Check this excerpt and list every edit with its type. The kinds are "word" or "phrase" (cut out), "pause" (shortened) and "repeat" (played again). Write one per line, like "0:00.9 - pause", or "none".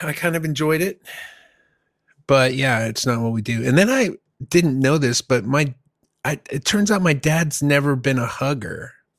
none